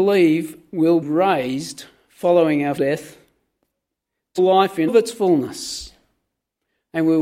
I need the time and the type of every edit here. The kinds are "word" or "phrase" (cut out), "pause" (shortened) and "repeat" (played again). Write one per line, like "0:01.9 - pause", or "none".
0:01.0 - word
0:02.8 - word
0:04.4 - word
0:04.9 - word